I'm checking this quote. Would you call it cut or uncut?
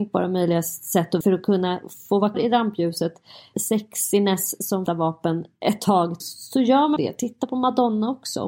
cut